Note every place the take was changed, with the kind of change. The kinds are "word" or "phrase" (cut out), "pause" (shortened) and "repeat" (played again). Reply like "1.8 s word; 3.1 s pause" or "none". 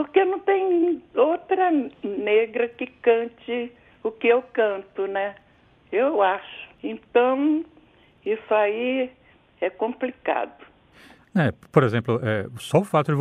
6.7 s pause